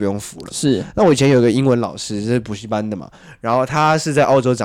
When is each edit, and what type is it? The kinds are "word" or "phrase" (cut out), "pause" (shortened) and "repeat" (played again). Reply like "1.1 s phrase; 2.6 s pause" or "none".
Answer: none